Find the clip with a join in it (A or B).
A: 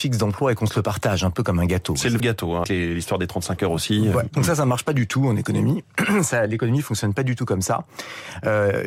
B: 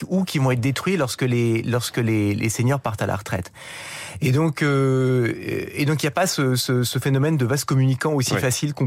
A